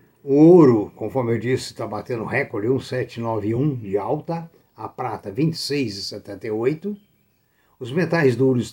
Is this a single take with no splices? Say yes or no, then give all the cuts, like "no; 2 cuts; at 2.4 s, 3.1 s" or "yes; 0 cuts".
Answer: yes; 0 cuts